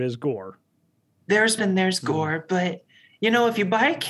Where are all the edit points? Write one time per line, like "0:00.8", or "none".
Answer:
0:01.6